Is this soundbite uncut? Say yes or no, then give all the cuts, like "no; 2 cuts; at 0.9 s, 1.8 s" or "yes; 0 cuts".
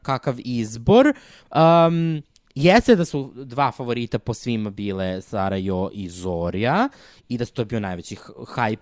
yes; 0 cuts